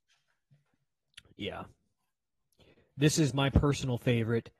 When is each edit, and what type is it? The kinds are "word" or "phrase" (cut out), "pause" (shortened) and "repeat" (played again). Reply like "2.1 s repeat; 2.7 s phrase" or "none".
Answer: none